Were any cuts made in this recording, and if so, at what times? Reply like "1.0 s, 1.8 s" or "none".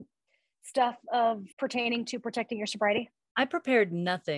1.5 s